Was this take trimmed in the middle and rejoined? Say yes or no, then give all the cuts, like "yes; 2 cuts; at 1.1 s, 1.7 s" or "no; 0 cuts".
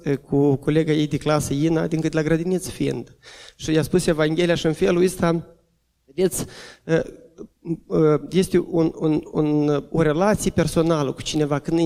no; 0 cuts